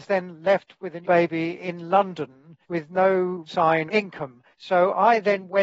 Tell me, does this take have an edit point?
yes; 5 cuts; at 1.0 s, 2.6 s, 3.5 s, 3.9 s, 4.5 s

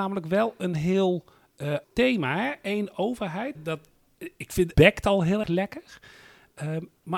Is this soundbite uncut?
no; 4 cuts; at 1.8 s, 3.6 s, 4.7 s, 5.4 s

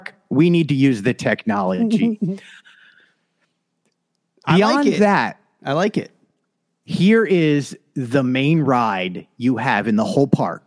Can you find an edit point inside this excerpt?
no; 0 cuts

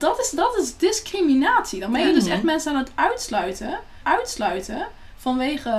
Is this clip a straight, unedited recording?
no; 1 cut; at 4.0 s

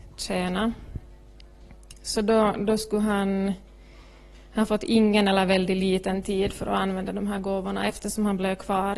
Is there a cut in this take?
no; 0 cuts

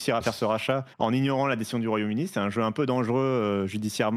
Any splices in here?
yes; 1 cut; at 0.9 s

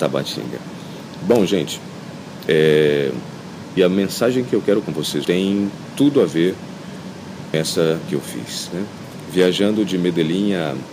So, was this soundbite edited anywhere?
yes; 5 cuts; at 3.8 s, 4.8 s, 5.2 s, 7.5 s, 8.1 s

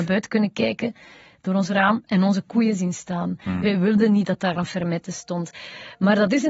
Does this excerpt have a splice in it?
no; 0 cuts

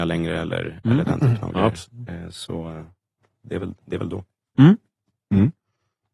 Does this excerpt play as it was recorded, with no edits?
yes; 0 cuts

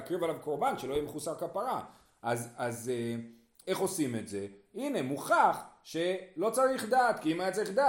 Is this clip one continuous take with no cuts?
yes; 0 cuts

